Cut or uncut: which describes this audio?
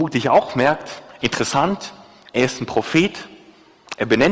uncut